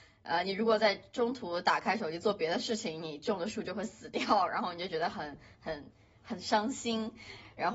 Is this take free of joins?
yes; 0 cuts

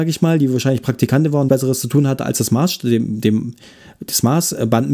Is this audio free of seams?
no; 1 cut; at 1.5 s

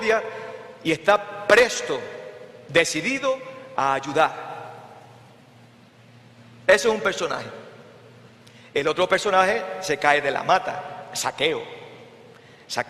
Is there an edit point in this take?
no; 0 cuts

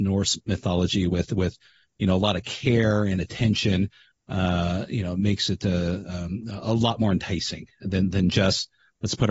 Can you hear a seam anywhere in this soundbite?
no; 0 cuts

